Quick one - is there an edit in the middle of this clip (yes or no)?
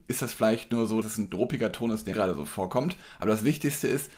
yes